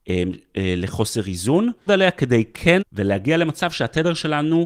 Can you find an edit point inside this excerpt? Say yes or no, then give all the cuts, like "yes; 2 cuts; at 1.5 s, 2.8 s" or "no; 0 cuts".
yes; 2 cuts; at 1.9 s, 2.8 s